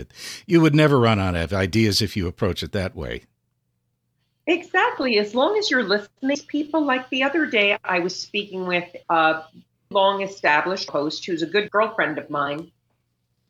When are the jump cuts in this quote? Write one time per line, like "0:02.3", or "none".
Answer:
0:09.0
0:09.9
0:10.9